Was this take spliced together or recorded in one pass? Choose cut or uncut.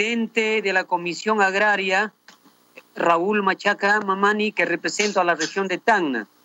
uncut